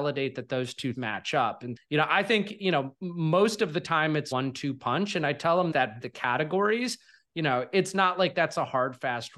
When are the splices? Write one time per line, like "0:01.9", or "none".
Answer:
0:00.9
0:01.8
0:04.3
0:06.0